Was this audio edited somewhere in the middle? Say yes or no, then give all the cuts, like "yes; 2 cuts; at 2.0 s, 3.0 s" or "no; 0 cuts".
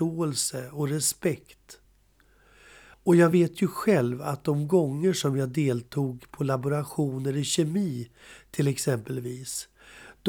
no; 0 cuts